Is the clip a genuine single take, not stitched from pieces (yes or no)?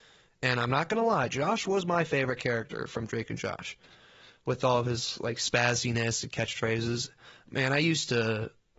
yes